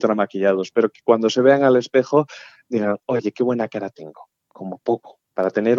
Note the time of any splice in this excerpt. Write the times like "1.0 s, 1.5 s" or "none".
none